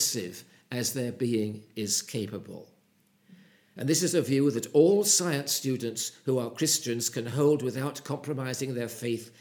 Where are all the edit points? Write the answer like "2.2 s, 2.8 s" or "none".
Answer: none